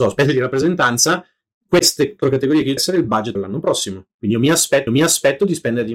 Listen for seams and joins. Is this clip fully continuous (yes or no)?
no